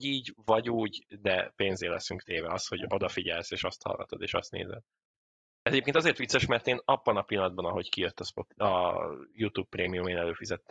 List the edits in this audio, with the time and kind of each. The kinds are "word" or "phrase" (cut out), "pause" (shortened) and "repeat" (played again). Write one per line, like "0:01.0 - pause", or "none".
0:05.0 - pause